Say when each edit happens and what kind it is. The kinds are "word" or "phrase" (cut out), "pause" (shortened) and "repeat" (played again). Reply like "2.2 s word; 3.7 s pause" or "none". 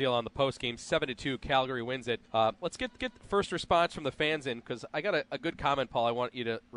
2.3 s pause; 3.0 s repeat